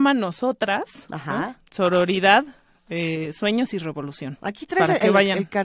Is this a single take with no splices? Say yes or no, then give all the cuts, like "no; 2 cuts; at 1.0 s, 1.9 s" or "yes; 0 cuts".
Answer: yes; 0 cuts